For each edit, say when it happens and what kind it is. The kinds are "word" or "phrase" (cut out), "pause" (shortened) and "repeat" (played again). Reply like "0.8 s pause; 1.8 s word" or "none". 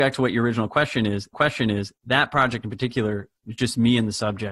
1.3 s repeat; 3.4 s pause